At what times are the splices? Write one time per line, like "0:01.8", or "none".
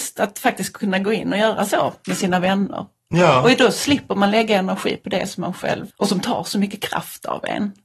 0:05.9